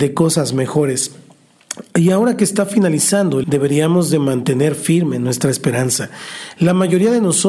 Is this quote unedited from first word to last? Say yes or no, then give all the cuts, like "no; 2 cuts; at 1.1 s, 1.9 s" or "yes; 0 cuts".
no; 1 cut; at 3.4 s